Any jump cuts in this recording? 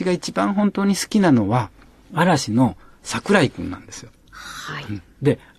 no; 0 cuts

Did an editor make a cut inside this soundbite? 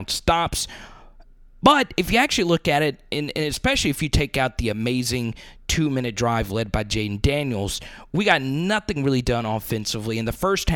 no; 0 cuts

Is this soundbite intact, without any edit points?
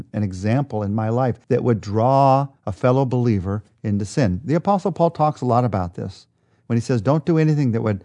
no; 2 cuts; at 1.4 s, 2.6 s

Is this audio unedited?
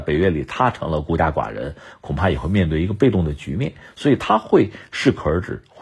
yes; 0 cuts

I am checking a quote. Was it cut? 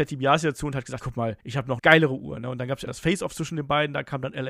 yes; 4 cuts; at 1.0 s, 1.4 s, 1.8 s, 2.9 s

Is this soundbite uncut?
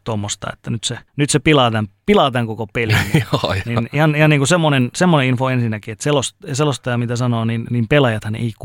no; 1 cut; at 1.1 s

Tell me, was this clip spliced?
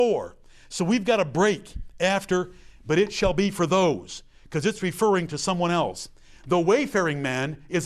no; 0 cuts

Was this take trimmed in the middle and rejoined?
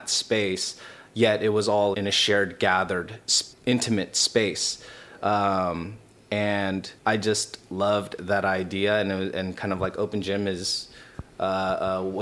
yes; 3 cuts; at 1.9 s, 3.5 s, 7.0 s

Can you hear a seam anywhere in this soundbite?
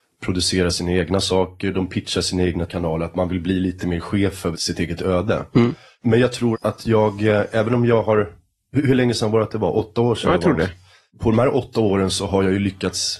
yes; 3 cuts; at 2.7 s, 4.5 s, 6.5 s

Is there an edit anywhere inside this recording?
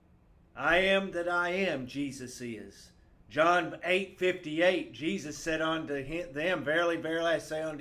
no; 0 cuts

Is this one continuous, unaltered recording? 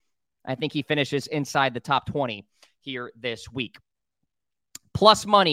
yes; 0 cuts

